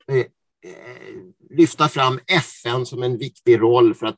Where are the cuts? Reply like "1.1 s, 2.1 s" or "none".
none